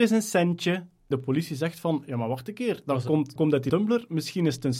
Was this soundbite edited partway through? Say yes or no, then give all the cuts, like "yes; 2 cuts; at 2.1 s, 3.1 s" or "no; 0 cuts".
yes; 3 cuts; at 1.1 s, 3.4 s, 3.7 s